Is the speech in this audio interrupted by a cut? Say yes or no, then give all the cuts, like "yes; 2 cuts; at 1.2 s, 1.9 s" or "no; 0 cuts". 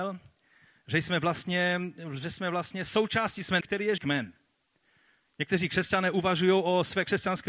yes; 2 cuts; at 3.6 s, 4.0 s